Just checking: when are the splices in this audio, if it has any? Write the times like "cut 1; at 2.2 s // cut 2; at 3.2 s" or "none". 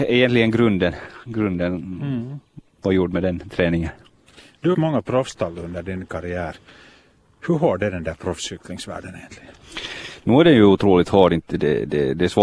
cut 1; at 4.7 s